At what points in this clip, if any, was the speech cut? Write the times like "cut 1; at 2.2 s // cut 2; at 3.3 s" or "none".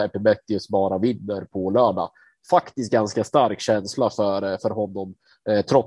none